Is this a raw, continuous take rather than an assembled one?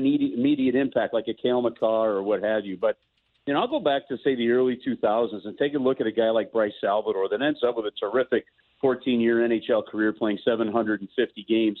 yes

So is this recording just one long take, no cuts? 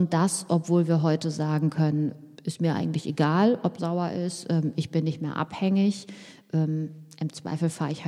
no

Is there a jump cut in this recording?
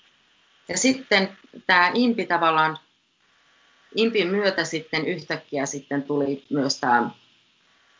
no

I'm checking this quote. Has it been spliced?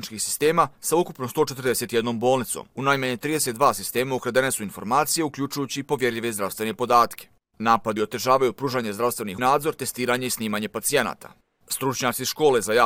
yes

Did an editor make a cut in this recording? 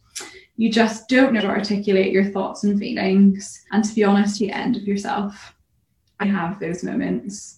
yes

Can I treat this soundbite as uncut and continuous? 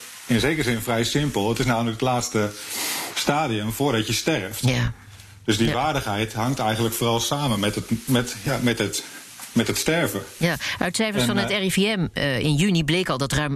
yes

